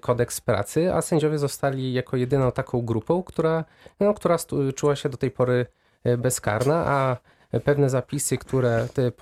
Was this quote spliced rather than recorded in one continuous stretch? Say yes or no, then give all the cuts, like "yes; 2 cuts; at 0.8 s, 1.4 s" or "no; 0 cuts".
no; 0 cuts